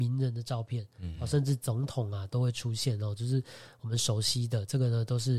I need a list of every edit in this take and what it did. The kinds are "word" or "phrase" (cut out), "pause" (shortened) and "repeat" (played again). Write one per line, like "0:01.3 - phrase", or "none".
none